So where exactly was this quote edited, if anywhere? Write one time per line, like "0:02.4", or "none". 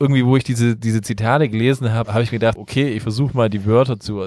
0:02.0
0:02.6